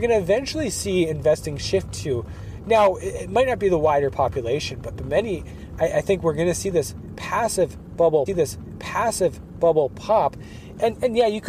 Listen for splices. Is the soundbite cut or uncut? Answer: cut